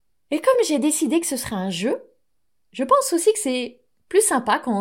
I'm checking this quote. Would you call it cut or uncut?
cut